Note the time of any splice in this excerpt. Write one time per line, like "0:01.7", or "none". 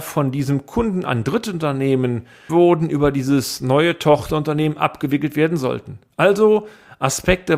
0:02.5